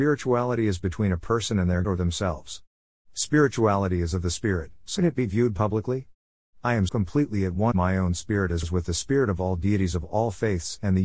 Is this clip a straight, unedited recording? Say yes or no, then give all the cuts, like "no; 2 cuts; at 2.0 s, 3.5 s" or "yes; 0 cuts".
no; 5 cuts; at 1.8 s, 5.0 s, 6.9 s, 7.7 s, 8.6 s